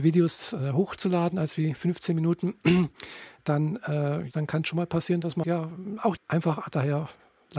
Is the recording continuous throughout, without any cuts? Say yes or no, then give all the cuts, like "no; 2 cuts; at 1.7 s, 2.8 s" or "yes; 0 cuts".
no; 3 cuts; at 4.3 s, 5.4 s, 6.2 s